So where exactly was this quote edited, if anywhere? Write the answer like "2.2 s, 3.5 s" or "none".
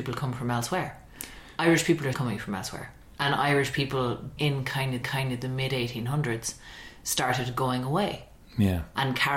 2.1 s, 4.4 s, 5.0 s